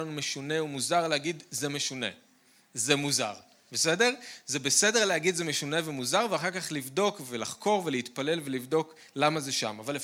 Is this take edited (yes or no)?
no